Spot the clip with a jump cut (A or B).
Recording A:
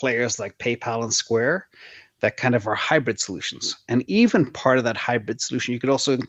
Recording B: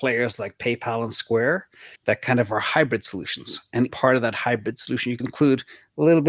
B